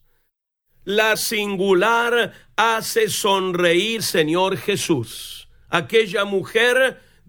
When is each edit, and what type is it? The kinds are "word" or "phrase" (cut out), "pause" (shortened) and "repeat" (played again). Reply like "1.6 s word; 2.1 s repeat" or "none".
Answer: 1.1 s word; 4.0 s word